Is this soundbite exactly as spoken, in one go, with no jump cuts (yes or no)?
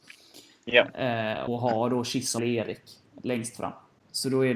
no